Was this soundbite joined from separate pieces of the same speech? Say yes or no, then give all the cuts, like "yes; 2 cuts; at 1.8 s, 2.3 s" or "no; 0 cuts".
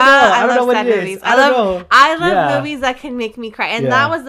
no; 0 cuts